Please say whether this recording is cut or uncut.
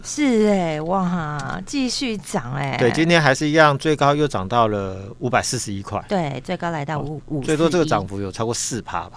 uncut